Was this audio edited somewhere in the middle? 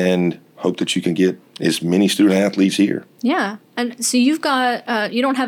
yes; 1 cut; at 1.5 s

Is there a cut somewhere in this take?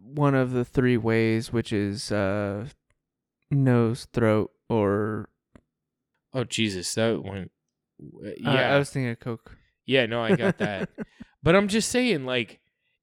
no; 0 cuts

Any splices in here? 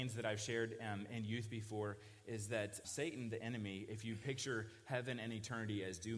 yes; 1 cut; at 2.8 s

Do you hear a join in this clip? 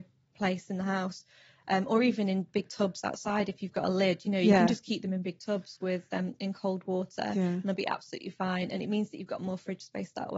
no; 0 cuts

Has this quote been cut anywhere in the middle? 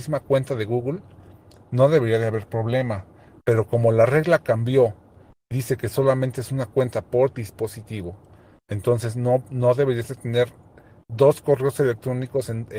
no; 0 cuts

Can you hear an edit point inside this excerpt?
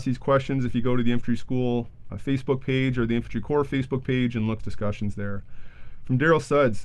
yes; 1 cut; at 4.6 s

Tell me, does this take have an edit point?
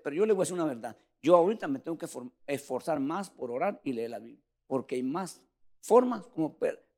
no; 0 cuts

